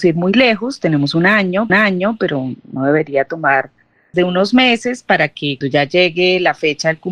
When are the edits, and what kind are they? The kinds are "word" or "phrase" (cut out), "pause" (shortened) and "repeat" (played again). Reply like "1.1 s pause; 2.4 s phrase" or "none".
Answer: 1.7 s repeat; 4.1 s word; 5.6 s word

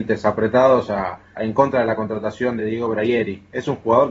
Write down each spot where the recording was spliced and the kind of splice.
1.3 s word; 2.6 s word

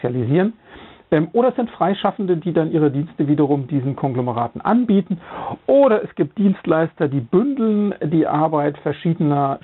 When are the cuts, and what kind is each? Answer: none

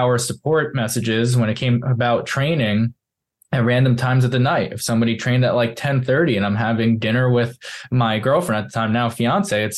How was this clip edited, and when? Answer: none

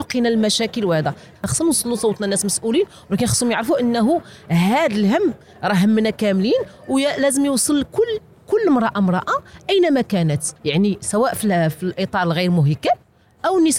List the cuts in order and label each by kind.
10.6 s pause

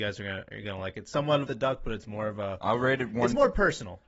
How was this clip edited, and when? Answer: 1.5 s phrase

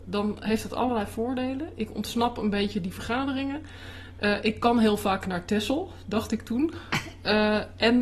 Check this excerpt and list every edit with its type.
none

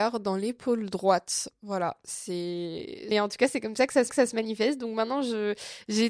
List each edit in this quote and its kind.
3.1 s phrase; 4.1 s repeat

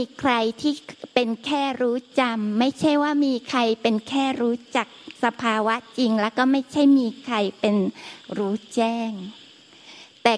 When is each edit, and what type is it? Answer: 5.2 s pause

